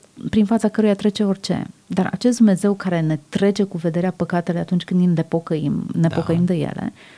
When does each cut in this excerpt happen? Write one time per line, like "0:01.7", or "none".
0:01.8